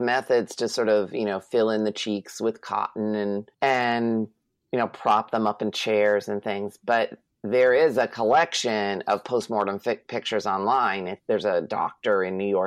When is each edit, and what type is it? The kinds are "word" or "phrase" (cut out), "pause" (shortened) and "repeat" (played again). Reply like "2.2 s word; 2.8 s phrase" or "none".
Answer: 3.5 s pause